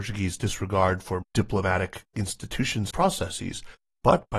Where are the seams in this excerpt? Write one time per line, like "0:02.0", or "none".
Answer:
0:01.2
0:02.9